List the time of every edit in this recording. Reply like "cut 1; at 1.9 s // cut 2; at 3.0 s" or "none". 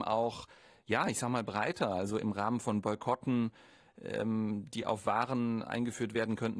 none